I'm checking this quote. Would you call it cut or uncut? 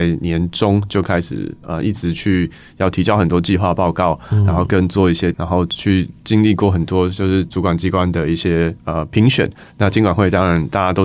cut